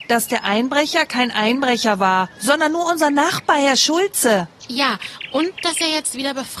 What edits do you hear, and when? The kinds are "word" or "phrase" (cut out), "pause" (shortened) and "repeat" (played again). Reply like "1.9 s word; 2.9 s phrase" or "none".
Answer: 2.3 s pause

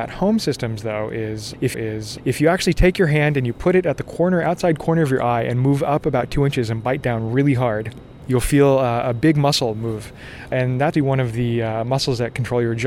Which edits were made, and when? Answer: 1.7 s repeat; 10.9 s word

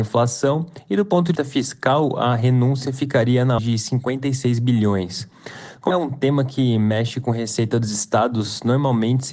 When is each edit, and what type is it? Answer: 1.4 s word; 3.6 s word; 5.9 s word

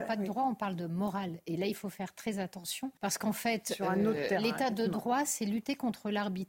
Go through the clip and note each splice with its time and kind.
3.0 s pause

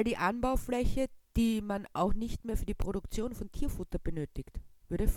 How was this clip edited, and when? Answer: 1.2 s pause

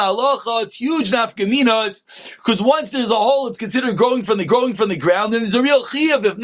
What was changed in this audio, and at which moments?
4.5 s repeat

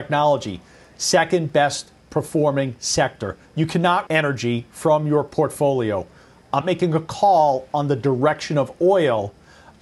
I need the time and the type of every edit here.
3.4 s pause; 4.1 s word; 6.6 s word

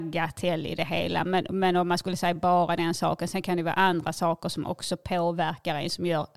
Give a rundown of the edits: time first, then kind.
none

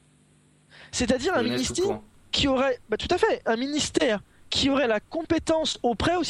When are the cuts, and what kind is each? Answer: none

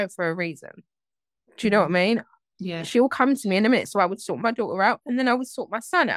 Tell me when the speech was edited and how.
none

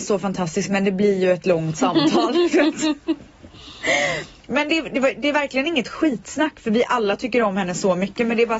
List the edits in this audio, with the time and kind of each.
none

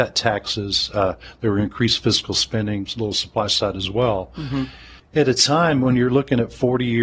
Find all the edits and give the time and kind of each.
5.0 s pause

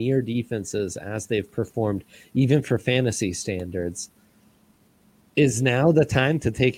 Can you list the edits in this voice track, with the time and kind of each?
none

